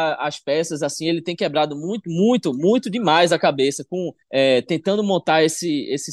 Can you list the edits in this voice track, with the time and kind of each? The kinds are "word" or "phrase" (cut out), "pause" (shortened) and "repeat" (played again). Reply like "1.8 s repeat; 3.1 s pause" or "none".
4.2 s pause